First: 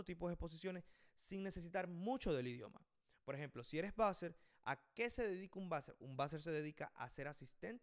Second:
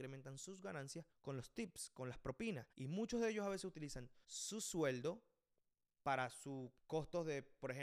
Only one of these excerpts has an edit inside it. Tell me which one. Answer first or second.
second